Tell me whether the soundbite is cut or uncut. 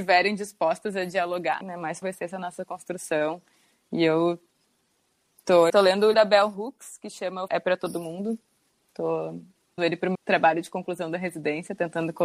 cut